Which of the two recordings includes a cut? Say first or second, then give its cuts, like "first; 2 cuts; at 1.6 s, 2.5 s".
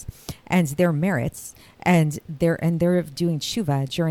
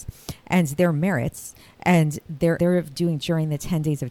second; 2 cuts; at 2.6 s, 3.2 s